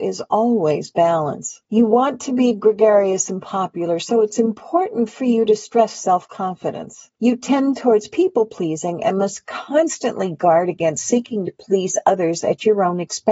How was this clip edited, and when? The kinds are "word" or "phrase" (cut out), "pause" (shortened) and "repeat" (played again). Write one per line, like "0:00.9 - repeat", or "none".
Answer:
0:01.6 - pause
0:07.1 - pause